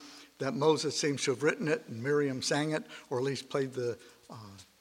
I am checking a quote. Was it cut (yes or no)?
no